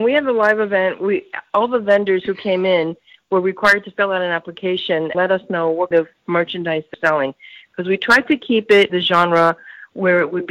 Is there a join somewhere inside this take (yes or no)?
yes